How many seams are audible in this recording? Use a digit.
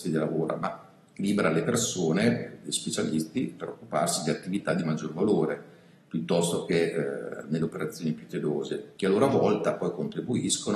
0